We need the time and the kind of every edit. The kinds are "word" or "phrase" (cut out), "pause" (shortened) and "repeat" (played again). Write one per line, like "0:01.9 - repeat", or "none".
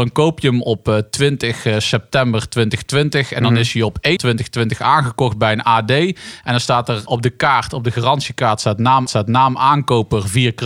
0:04.2 - word
0:07.1 - word
0:09.1 - repeat